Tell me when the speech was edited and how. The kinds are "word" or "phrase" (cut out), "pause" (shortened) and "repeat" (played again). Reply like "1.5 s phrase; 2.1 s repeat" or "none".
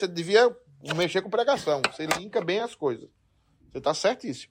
none